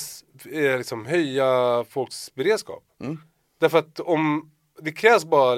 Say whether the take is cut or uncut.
uncut